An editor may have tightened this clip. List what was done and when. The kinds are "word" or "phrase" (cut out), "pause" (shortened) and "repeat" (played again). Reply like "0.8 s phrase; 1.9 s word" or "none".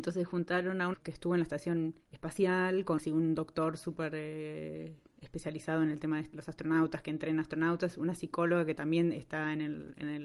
0.9 s phrase; 2.0 s pause; 3.0 s word; 6.3 s word